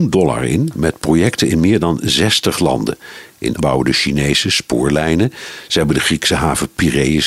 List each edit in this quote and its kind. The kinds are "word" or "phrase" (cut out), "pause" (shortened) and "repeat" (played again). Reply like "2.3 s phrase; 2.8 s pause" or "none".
3.6 s word